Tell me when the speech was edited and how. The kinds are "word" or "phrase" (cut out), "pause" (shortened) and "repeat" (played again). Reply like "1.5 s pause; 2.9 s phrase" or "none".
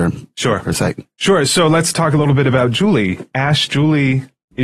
none